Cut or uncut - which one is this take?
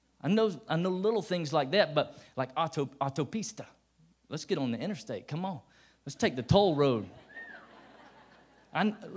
uncut